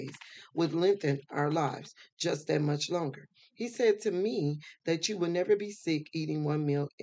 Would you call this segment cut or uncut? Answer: uncut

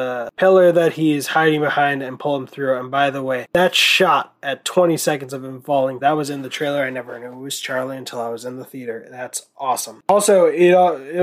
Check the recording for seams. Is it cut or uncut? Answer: cut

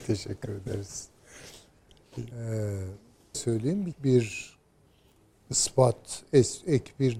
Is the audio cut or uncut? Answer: cut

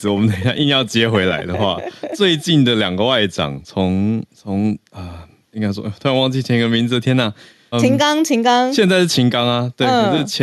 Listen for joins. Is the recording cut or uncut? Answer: cut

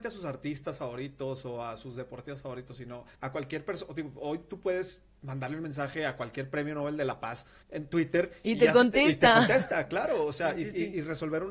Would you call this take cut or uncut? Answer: cut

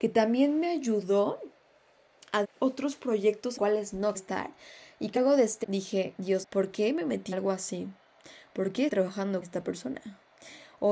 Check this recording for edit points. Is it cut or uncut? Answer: cut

